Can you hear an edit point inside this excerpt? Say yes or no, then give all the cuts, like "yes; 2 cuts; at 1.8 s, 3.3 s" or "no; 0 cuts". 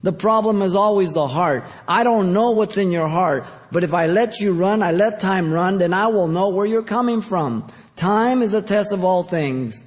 no; 0 cuts